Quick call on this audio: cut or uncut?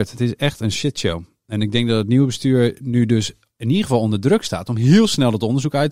uncut